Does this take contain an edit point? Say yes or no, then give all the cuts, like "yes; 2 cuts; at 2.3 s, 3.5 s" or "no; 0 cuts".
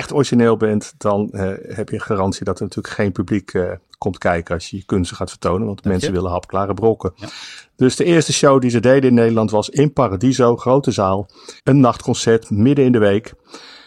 yes; 1 cut; at 11.6 s